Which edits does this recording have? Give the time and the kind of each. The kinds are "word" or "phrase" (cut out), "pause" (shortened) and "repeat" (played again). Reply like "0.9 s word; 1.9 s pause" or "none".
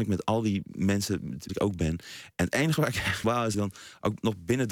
1.5 s word; 3.2 s word; 3.5 s phrase

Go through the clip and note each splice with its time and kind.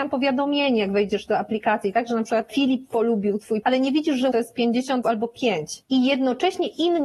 3.6 s word; 4.3 s word; 5.0 s word

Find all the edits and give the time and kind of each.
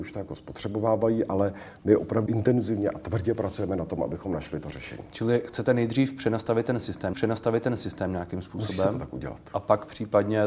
2.3 s word; 7.1 s repeat

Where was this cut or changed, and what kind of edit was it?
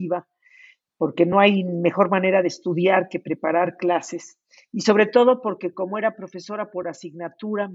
none

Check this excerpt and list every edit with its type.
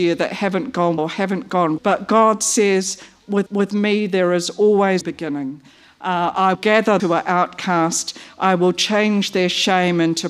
1.0 s word; 1.8 s word; 3.5 s repeat; 5.0 s phrase; 6.5 s word; 7.0 s word

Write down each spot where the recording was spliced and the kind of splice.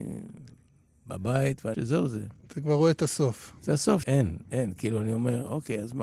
1.7 s word; 4.0 s word

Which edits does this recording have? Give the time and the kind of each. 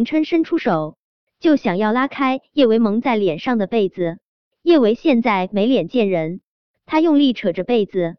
none

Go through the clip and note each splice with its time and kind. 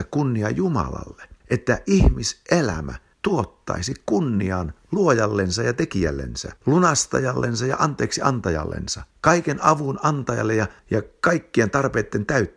1.4 s pause; 3.1 s pause; 6.6 s pause; 9.1 s pause; 10.8 s pause

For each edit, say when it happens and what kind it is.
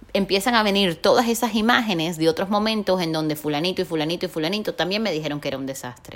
none

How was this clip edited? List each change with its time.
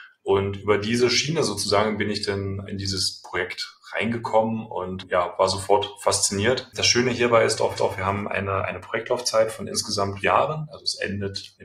2.7 s word; 7.8 s repeat; 10.2 s word

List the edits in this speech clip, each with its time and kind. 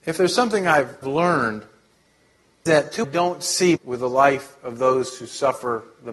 1.0 s word; 2.7 s word; 3.0 s phrase; 3.8 s phrase

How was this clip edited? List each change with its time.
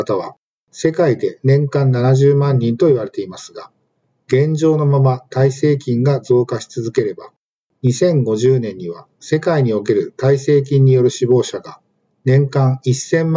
none

